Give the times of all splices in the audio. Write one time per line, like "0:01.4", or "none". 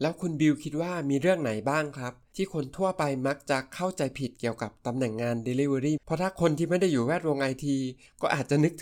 0:06.0